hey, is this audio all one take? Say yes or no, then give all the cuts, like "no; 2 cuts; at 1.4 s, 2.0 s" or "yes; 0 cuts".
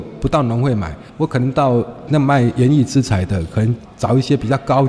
no; 1 cut; at 1.1 s